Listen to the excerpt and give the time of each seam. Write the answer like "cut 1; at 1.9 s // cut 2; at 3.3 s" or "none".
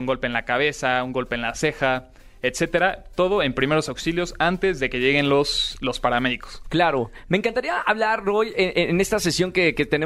none